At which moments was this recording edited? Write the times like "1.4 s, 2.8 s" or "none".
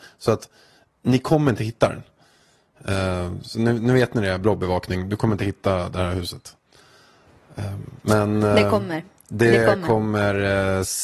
none